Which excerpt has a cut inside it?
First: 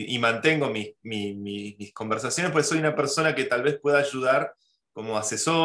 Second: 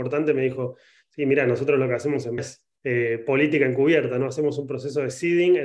second; 2 cuts; at 2.4 s, 2.8 s

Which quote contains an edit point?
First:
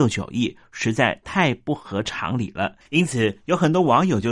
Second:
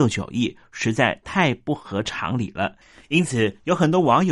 first; 1 cut; at 2.8 s

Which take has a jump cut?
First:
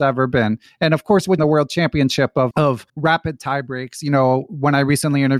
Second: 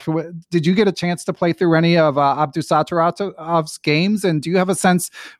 first; 3 cuts; at 1.4 s, 2.5 s, 2.9 s

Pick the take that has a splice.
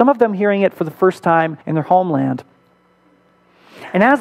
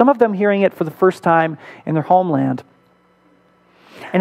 first; 1 cut; at 1.6 s

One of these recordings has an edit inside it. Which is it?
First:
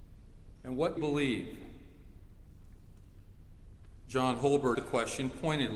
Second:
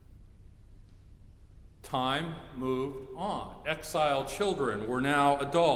first; 2 cuts; at 1.0 s, 4.7 s

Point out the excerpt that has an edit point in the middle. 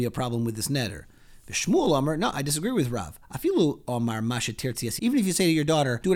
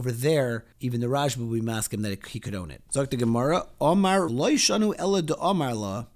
second; 1 cut; at 4.3 s

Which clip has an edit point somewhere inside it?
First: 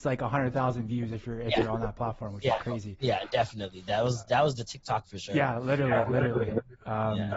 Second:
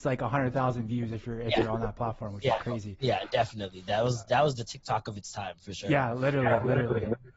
first; 1 cut; at 5.0 s

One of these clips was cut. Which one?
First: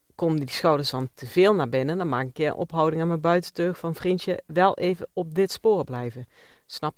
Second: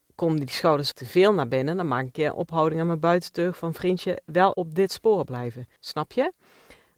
second; 3 cuts; at 0.9 s, 4.5 s, 5.8 s

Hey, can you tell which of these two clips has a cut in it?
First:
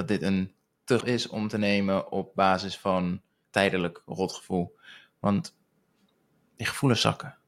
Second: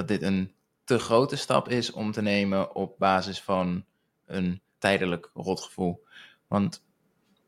first; 2 cuts; at 1.0 s, 3.4 s

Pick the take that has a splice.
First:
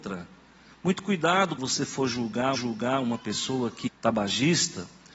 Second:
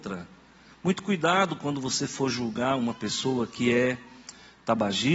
first; 3 cuts; at 1.6 s, 2.5 s, 3.9 s

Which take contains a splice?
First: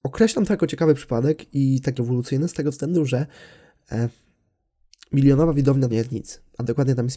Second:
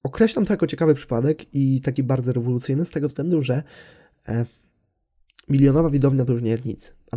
first; 2 cuts; at 2.0 s, 5.9 s

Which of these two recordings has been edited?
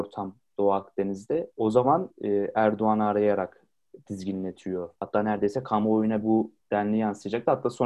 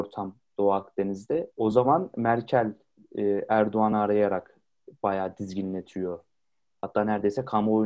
first; 5 cuts; at 2.1 s, 4.1 s, 5.0 s, 6.2 s, 6.6 s

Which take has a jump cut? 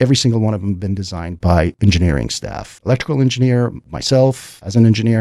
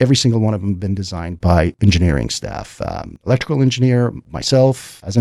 first; 1 cut; at 2.8 s

